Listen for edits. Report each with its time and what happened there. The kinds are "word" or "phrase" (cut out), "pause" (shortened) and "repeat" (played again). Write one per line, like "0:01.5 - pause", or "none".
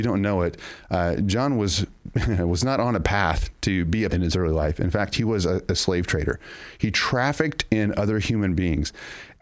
0:04.1 - phrase